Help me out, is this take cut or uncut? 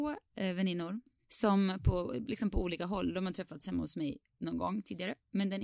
uncut